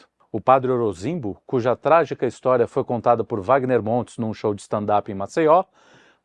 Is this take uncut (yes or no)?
yes